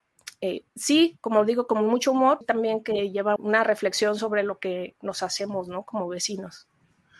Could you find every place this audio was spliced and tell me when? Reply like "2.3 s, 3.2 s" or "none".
2.4 s, 3.4 s